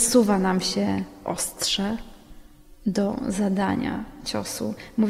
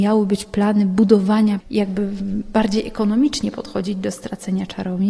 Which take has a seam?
second; 1 cut; at 1.6 s

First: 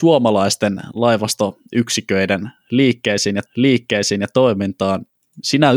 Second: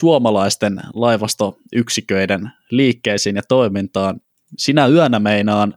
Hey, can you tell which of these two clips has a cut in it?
first; 1 cut; at 3.5 s

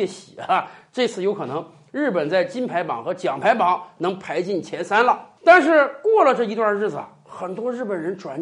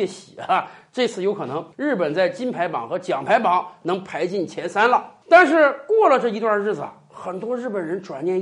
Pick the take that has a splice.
second; 1 cut; at 1.7 s

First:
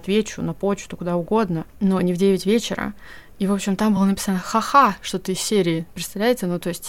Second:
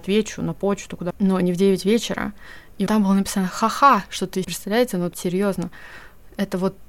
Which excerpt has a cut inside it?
second; 4 cuts; at 1.1 s, 2.9 s, 4.4 s, 5.1 s

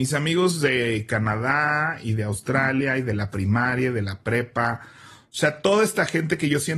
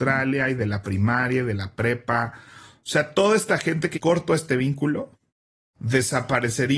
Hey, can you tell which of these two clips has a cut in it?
second; 1 cut; at 3.9 s

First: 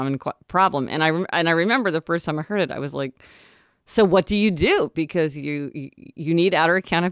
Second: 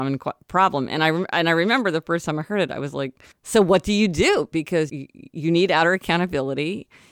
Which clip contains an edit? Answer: second; 2 cuts; at 3.3 s, 4.9 s

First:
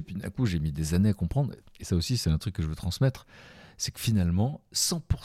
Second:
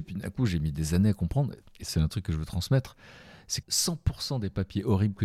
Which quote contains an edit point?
second; 2 cuts; at 1.9 s, 3.6 s

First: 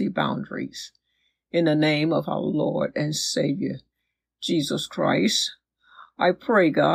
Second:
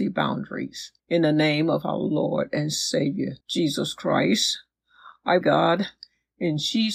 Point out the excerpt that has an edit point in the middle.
second; 3 cuts; at 1.0 s, 3.4 s, 5.4 s

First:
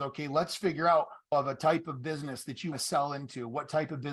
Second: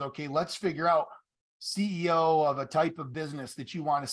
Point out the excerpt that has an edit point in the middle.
first; 2 cuts; at 1.3 s, 2.7 s

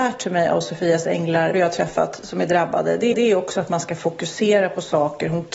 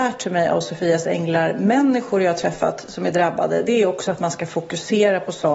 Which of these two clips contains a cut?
first; 2 cuts; at 1.5 s, 3.1 s

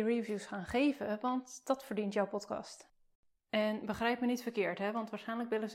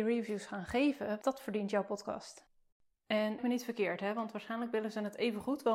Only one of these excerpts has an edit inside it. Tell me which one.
second; 2 cuts; at 1.2 s, 3.4 s

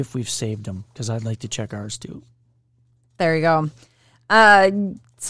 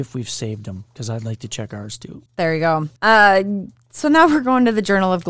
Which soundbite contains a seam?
second; 2 cuts; at 2.3 s, 3.0 s

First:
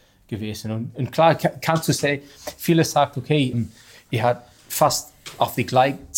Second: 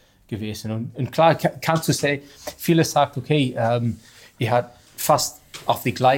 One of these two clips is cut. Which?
first; 1 cut; at 3.5 s

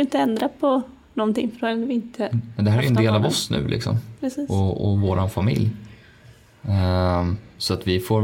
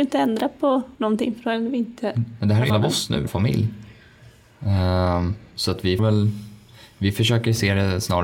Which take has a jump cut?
second; 4 cuts; at 0.9 s, 2.7 s, 3.3 s, 6.0 s

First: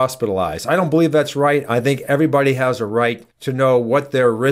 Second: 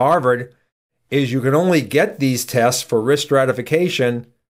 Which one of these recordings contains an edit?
first; 1 cut; at 3.3 s

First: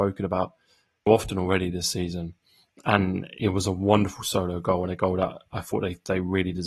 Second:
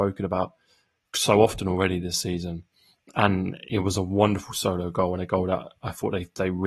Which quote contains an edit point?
first; 1 cut; at 1.1 s

